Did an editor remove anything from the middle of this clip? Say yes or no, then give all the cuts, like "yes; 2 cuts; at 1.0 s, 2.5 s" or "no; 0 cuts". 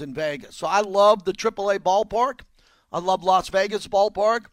no; 0 cuts